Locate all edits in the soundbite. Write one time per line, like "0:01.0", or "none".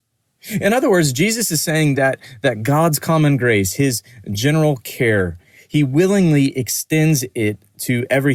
none